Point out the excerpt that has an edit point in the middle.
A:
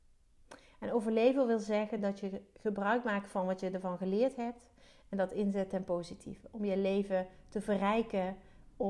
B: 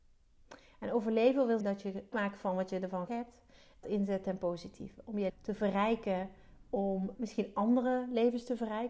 B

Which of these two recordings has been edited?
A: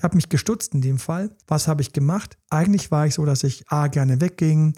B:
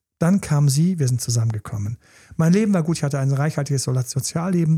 A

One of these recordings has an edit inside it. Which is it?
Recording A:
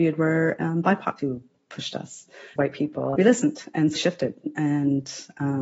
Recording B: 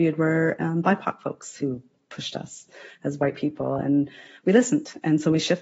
A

